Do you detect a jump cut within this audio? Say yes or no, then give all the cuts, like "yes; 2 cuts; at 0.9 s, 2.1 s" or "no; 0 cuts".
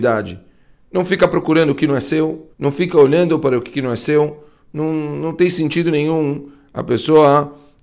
yes; 1 cut; at 2.5 s